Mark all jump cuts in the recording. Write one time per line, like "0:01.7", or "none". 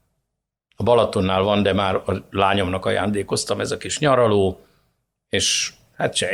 none